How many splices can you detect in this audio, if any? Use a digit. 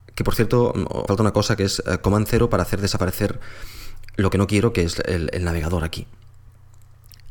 1